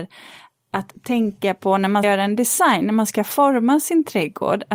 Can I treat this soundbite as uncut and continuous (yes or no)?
no